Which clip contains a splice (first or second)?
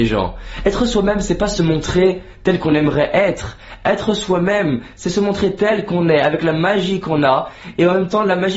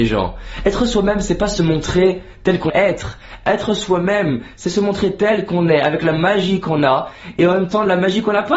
second